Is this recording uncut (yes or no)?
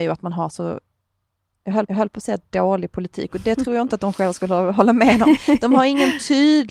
no